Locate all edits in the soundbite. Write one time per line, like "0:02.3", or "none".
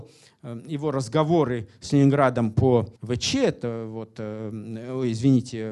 0:03.0